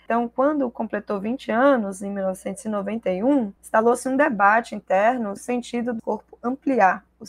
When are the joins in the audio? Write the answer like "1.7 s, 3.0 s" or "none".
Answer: 3.6 s, 5.4 s, 6.0 s